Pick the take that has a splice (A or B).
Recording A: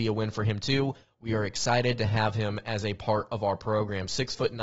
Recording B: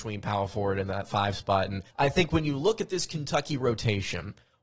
B